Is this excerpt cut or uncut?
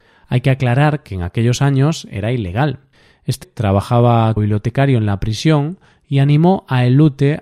cut